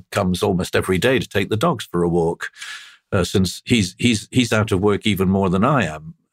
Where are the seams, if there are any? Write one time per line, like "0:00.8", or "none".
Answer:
none